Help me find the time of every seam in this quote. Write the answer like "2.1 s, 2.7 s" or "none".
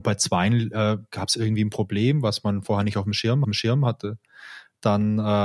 3.4 s